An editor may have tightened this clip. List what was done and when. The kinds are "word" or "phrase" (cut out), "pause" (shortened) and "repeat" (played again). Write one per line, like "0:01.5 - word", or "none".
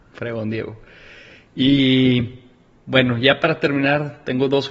none